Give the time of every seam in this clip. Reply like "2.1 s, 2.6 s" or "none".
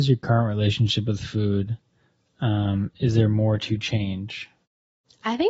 none